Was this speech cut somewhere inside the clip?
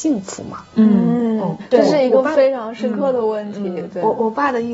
yes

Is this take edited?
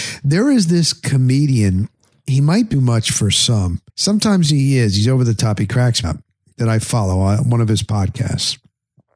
yes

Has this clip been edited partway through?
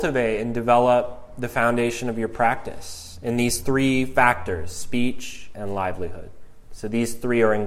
yes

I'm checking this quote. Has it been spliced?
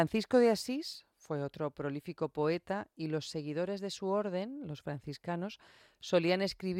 no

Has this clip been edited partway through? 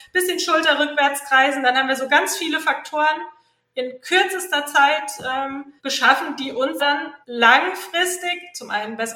yes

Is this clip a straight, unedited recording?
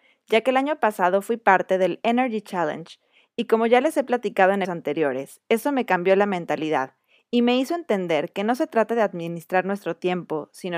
no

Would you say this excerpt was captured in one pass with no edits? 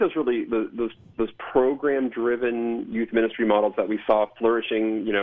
yes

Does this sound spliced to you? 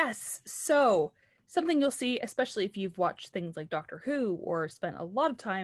no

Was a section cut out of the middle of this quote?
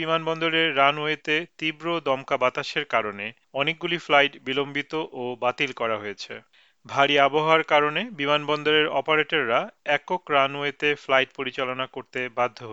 no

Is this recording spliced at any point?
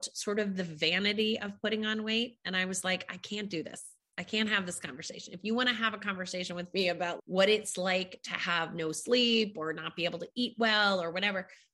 no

